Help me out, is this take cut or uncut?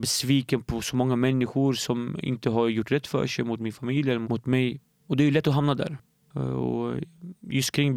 uncut